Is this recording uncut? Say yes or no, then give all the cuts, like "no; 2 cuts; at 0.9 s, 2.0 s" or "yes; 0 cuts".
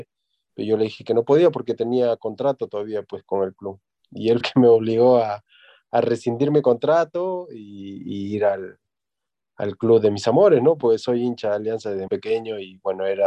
no; 2 cuts; at 4.4 s, 12.1 s